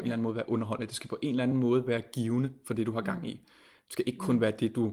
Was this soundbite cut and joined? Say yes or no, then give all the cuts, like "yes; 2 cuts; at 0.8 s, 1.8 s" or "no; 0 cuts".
no; 0 cuts